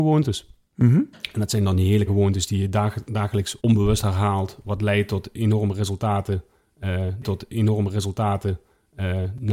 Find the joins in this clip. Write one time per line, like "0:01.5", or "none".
0:02.1
0:03.6
0:07.2